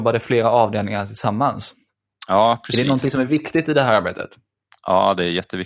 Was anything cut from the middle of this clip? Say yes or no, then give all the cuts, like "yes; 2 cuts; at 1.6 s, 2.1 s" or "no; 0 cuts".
no; 0 cuts